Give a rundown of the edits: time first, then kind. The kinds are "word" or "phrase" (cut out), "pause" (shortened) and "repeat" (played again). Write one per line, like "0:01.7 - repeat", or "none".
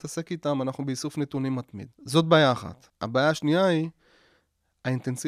0:01.9 - pause
0:02.9 - pause